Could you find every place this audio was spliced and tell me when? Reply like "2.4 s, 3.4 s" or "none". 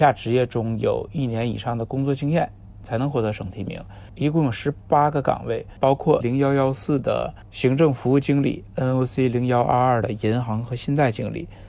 6.2 s